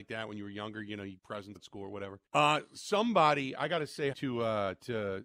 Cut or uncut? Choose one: cut